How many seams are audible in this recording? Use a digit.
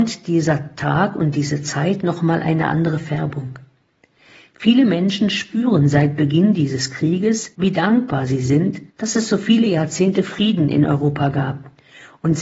2